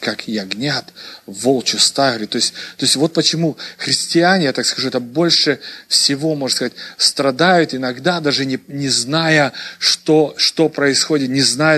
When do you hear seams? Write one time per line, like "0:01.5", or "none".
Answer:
none